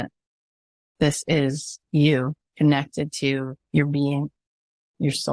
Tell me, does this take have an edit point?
yes; 2 cuts; at 2.4 s, 3.6 s

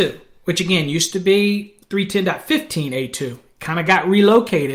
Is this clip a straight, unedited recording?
yes; 0 cuts

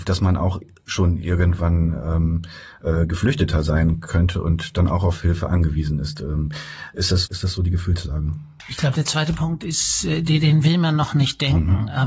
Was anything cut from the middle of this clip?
yes; 1 cut; at 7.3 s

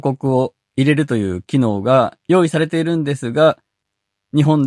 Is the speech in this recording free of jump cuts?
no; 1 cut; at 2.2 s

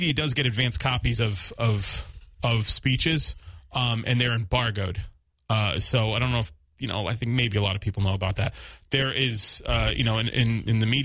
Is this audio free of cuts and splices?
yes; 0 cuts

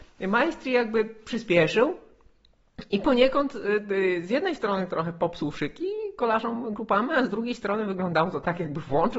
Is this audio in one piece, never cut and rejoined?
yes; 0 cuts

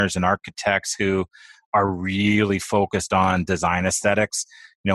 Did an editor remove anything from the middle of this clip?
no; 0 cuts

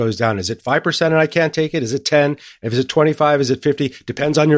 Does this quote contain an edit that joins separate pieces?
no; 0 cuts

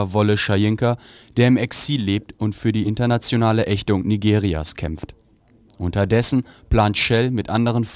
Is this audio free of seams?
yes; 0 cuts

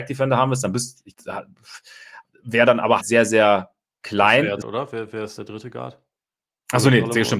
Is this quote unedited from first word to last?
no; 4 cuts; at 1.1 s, 3.0 s, 4.6 s, 5.4 s

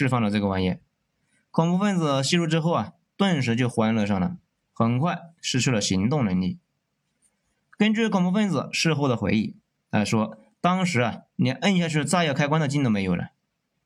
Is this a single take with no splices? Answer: yes; 0 cuts

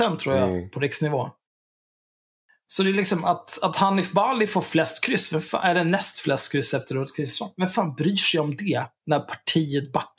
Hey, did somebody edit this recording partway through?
no; 0 cuts

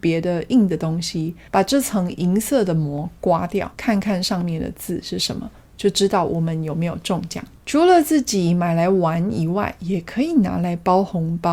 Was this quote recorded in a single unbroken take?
no; 2 cuts; at 3.7 s, 7.5 s

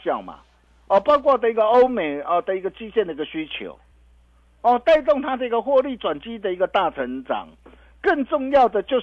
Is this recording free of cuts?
yes; 0 cuts

